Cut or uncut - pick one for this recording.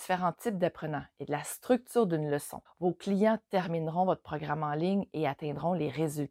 cut